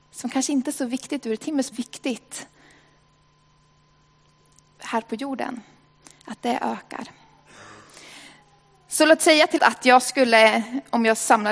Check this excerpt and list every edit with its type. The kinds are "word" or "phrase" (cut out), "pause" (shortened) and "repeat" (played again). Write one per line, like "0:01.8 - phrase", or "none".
0:01.7 - phrase
0:09.6 - word